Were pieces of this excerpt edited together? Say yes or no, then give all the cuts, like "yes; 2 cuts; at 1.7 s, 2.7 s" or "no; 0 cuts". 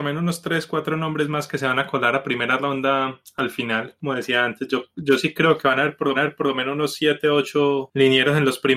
yes; 1 cut; at 6.1 s